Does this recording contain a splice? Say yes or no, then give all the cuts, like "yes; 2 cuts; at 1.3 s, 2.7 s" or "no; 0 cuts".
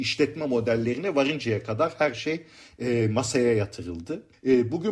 no; 0 cuts